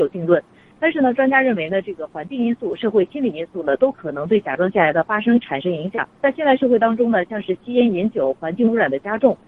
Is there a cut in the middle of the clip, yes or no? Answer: yes